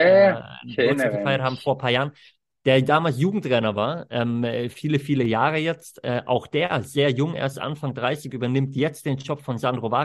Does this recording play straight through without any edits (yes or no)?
yes